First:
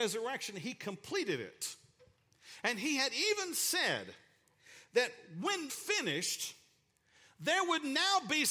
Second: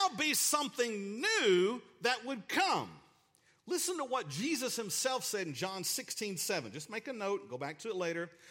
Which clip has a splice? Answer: first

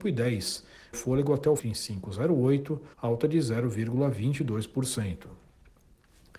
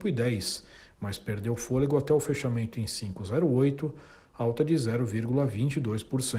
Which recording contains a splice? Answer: first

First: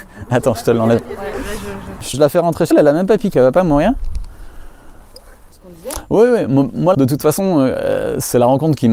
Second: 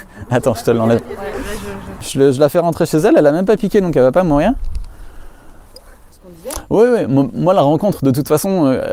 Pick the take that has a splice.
first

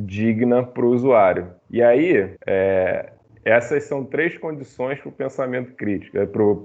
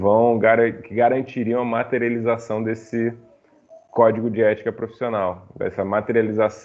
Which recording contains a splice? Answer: first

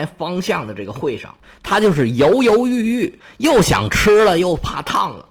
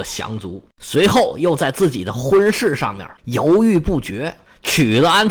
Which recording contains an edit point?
second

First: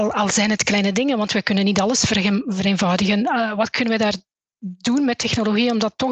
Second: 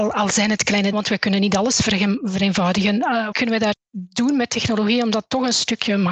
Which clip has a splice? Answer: second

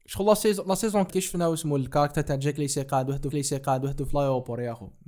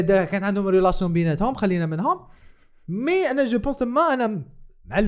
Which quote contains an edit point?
first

